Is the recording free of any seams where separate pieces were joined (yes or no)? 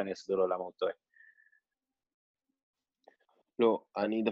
yes